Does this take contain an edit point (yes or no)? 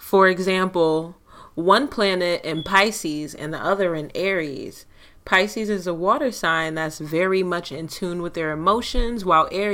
no